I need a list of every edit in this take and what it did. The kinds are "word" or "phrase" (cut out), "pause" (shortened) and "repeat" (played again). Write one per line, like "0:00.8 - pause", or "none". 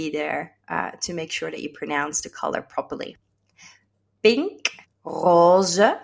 0:04.8 - pause